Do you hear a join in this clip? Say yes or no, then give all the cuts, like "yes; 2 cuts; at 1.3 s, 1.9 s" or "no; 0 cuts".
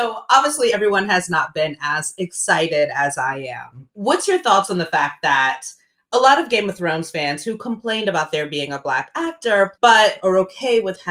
no; 0 cuts